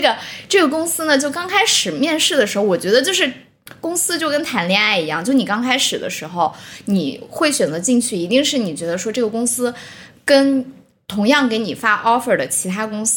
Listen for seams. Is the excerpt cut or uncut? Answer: uncut